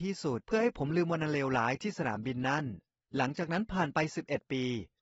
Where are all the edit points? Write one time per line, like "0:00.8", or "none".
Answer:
none